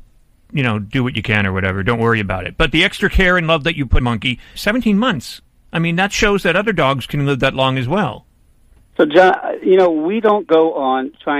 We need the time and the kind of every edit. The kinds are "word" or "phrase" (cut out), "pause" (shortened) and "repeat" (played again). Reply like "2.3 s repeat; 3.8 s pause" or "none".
4.0 s word; 4.6 s word; 5.6 s pause; 8.5 s pause